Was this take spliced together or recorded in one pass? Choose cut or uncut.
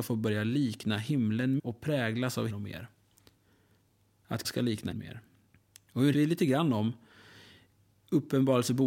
cut